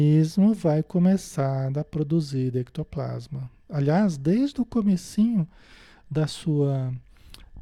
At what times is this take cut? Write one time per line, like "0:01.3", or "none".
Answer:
none